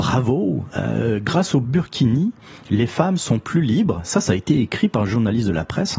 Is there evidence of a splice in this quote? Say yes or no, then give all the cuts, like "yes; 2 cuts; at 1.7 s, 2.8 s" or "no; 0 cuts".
no; 0 cuts